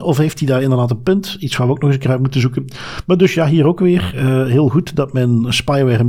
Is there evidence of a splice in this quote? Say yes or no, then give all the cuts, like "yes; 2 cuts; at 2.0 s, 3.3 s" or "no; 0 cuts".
no; 0 cuts